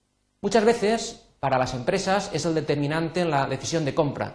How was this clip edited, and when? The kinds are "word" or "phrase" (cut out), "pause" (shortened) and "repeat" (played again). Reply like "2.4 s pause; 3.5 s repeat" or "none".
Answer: none